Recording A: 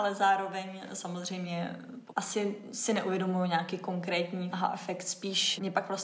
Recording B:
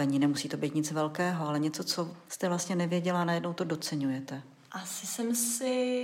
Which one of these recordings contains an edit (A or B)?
A